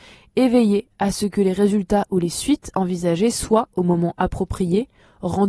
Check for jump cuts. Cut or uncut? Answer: uncut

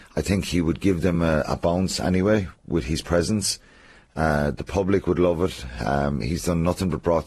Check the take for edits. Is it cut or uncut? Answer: uncut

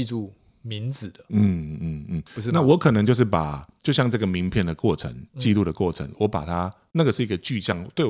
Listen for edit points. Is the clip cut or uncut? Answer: cut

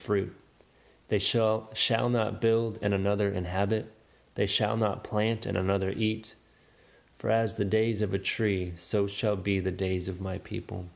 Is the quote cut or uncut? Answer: uncut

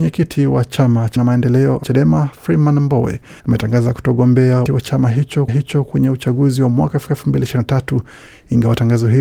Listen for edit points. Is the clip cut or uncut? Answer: cut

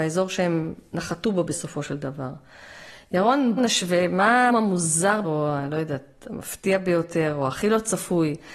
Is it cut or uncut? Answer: cut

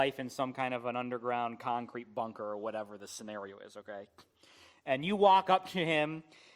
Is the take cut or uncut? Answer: uncut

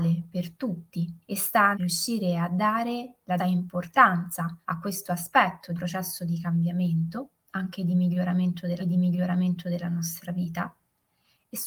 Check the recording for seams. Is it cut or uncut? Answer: cut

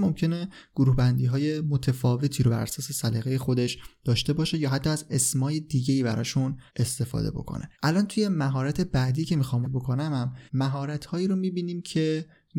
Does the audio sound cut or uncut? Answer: cut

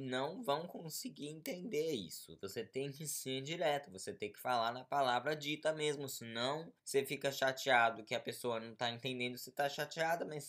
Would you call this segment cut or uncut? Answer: cut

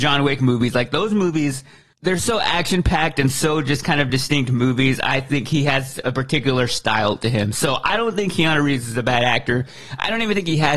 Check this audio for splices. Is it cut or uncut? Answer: uncut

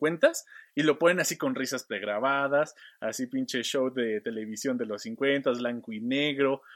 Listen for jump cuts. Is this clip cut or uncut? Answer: uncut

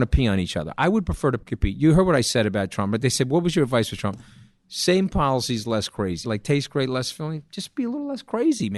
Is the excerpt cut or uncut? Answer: uncut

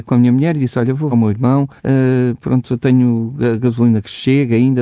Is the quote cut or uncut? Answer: cut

